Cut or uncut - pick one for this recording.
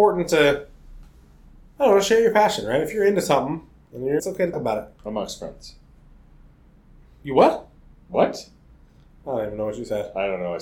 cut